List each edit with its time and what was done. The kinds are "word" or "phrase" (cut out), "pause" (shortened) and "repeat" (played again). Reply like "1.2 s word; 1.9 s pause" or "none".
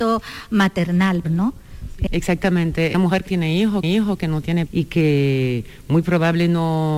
1.2 s word; 2.1 s word; 2.9 s phrase; 3.3 s word; 3.8 s repeat; 4.7 s word